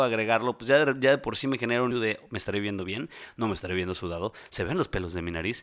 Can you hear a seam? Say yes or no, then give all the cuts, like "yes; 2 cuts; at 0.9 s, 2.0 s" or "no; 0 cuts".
yes; 1 cut; at 1.9 s